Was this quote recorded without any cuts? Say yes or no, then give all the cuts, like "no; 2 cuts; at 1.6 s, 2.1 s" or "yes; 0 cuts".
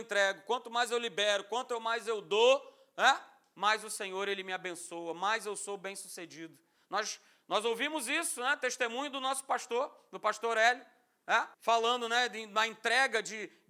no; 1 cut; at 11.5 s